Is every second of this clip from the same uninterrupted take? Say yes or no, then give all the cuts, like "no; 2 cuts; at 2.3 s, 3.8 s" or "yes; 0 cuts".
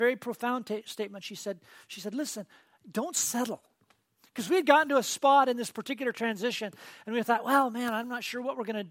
yes; 0 cuts